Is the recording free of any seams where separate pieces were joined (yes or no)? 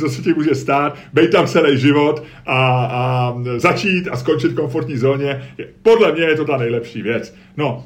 yes